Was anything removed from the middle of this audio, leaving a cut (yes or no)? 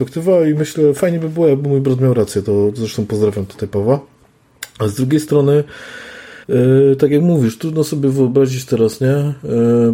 yes